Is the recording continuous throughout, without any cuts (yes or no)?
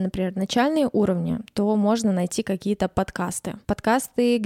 yes